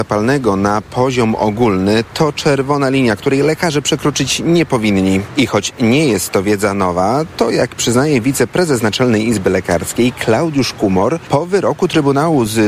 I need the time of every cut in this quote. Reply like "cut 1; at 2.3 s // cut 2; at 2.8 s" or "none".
none